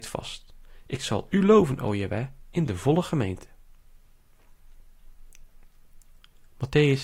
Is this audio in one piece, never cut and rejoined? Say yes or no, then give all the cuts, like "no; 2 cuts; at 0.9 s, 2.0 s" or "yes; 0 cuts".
yes; 0 cuts